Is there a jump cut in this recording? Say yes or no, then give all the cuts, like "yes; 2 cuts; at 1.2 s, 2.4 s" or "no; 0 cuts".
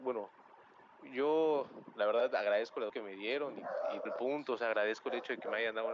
yes; 2 cuts; at 2.9 s, 4.1 s